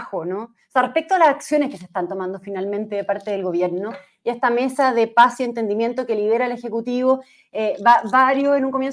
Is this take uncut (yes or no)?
yes